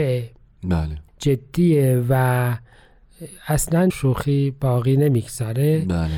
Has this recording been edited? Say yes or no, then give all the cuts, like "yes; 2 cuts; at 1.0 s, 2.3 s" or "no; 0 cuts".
yes; 2 cuts; at 1.1 s, 3.9 s